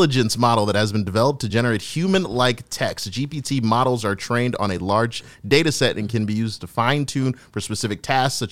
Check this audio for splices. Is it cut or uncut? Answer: uncut